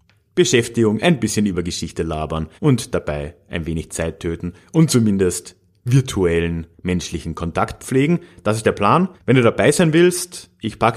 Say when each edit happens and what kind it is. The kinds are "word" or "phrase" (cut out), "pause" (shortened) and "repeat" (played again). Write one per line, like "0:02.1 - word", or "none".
0:02.6 - pause
0:06.7 - pause
0:09.2 - pause